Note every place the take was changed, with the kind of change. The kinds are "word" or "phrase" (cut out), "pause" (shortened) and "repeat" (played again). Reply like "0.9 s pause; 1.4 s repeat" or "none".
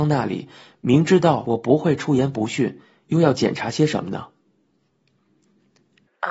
none